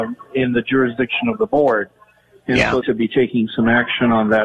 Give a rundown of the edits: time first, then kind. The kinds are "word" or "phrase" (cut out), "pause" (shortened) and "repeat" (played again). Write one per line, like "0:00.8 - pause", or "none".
0:02.8 - phrase